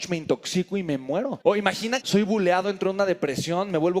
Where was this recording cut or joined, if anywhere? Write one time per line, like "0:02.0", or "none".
0:01.4
0:02.0